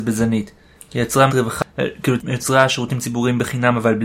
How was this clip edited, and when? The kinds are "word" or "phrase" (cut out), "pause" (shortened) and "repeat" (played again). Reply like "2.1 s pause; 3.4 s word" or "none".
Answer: 1.3 s word; 2.2 s word